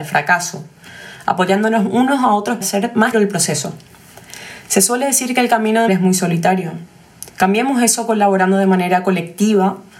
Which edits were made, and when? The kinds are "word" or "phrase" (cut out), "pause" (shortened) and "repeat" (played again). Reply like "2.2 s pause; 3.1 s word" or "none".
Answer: 2.6 s word; 3.1 s word; 5.9 s word; 7.3 s pause